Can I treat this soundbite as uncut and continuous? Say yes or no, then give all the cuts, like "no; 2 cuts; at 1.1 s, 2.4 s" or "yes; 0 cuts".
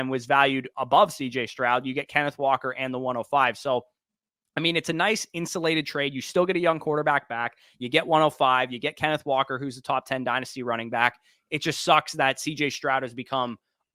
yes; 0 cuts